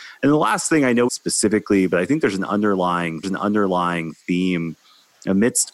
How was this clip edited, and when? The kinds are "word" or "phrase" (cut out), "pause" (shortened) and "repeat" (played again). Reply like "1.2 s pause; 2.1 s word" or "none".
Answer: 1.1 s phrase; 3.2 s repeat